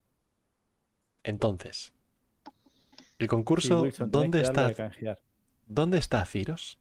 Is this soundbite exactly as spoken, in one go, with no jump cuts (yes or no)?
yes